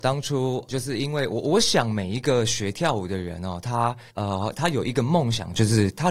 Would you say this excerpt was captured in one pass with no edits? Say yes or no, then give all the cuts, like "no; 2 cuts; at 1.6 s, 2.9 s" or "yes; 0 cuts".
no; 1 cut; at 4.1 s